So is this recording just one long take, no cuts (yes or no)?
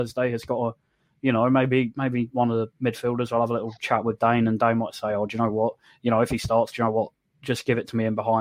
yes